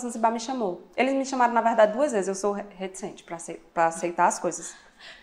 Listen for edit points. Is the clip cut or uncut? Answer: uncut